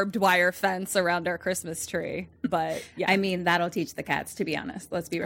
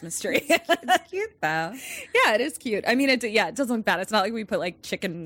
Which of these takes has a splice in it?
first; 1 cut; at 2.4 s

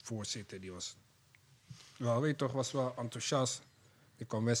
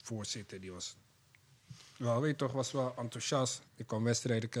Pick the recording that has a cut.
second; 1 cut; at 3.7 s

